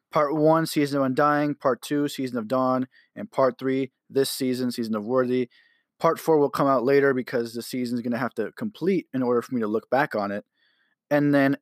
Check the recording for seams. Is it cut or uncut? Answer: uncut